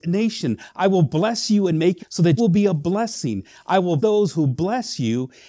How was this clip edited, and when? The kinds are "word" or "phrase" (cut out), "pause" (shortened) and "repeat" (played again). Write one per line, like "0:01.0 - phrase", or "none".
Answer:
0:02.0 - phrase
0:02.4 - word
0:04.0 - word